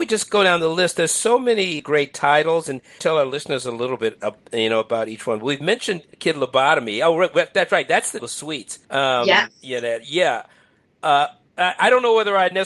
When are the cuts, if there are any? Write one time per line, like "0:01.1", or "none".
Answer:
0:01.8
0:03.0
0:06.1
0:08.2
0:08.8